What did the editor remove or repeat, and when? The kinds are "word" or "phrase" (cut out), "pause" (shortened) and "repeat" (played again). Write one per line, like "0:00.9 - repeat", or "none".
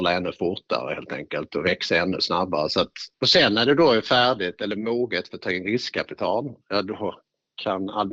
0:03.1 - pause